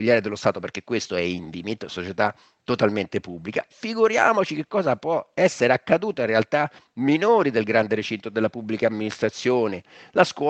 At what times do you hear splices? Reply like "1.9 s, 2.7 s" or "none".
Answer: none